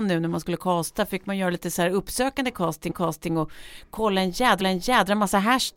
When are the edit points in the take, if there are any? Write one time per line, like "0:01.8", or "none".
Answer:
0:02.9
0:04.6